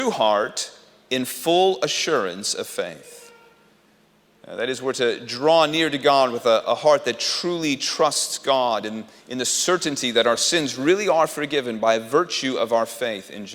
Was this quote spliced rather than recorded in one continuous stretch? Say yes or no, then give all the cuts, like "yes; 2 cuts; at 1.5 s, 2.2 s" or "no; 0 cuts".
no; 0 cuts